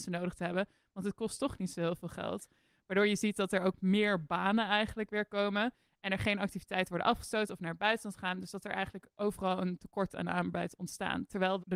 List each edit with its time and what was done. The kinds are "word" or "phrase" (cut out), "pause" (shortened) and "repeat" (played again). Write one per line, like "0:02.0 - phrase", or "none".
none